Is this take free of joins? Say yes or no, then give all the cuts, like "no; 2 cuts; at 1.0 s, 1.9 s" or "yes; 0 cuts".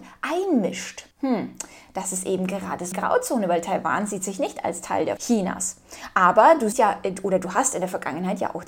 no; 4 cuts; at 1.1 s, 2.9 s, 5.2 s, 6.7 s